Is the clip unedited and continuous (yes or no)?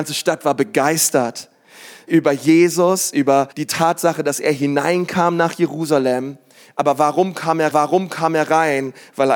no